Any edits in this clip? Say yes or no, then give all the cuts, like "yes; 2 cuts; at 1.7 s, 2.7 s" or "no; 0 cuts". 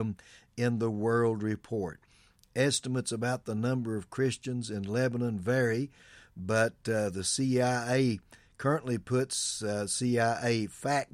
no; 0 cuts